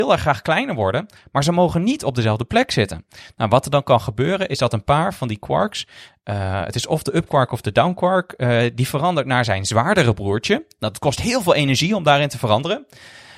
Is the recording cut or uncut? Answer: uncut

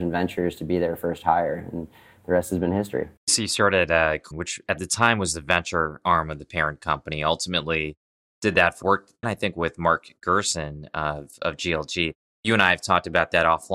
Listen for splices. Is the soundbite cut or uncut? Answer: cut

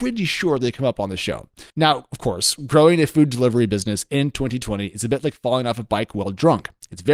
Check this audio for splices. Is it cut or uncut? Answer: cut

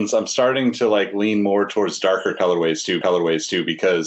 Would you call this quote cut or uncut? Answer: cut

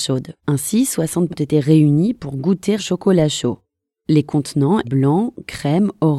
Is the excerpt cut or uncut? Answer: cut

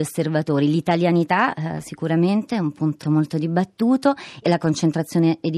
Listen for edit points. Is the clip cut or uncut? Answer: cut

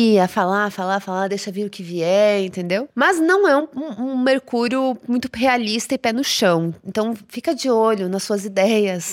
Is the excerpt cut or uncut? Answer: uncut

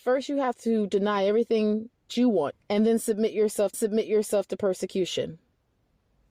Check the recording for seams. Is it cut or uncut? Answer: cut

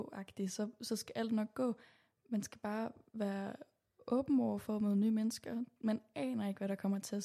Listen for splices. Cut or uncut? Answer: uncut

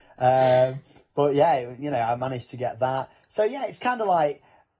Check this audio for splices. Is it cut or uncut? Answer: uncut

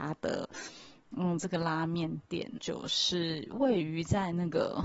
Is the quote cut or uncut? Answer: cut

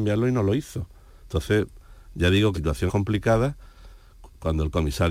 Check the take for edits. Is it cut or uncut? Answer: cut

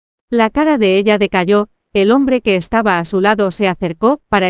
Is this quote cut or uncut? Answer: uncut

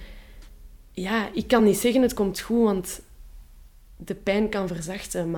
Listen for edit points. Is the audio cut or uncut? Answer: uncut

